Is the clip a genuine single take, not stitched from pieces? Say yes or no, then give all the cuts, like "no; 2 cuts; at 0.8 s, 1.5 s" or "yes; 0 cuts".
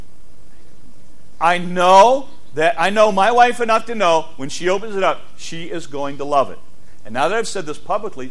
yes; 0 cuts